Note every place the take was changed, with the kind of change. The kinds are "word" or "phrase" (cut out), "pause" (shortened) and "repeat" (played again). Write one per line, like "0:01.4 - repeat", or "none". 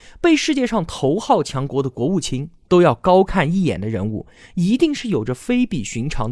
none